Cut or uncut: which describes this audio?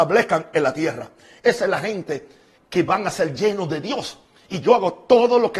uncut